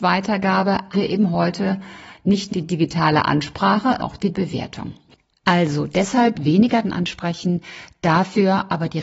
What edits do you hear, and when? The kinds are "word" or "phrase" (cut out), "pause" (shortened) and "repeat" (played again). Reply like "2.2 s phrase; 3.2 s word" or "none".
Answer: 0.9 s word; 2.5 s word; 4.0 s word; 4.3 s word; 6.3 s word; 6.8 s word